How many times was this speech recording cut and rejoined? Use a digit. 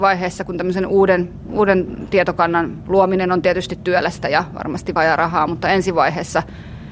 1